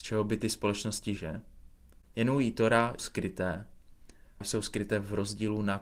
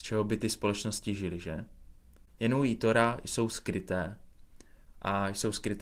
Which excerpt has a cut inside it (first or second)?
first